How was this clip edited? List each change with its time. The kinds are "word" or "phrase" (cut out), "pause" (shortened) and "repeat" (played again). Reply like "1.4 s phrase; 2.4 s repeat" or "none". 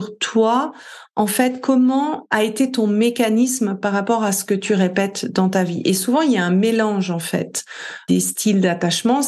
none